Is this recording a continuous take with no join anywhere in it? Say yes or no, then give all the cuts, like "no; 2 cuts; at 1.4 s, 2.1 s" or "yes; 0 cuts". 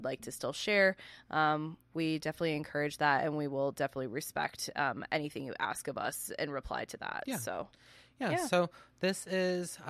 yes; 0 cuts